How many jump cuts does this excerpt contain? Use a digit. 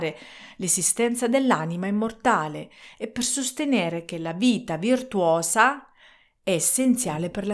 0